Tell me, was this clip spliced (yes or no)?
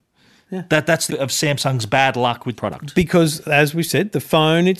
yes